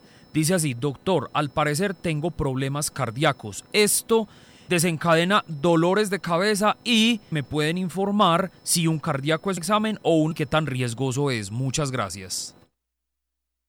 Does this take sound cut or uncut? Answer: cut